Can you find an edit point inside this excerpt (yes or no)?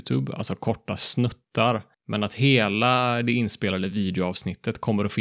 no